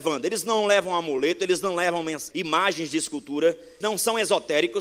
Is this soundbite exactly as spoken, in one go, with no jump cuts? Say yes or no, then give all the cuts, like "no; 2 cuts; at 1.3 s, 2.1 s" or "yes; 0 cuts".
no; 2 cuts; at 2.3 s, 3.8 s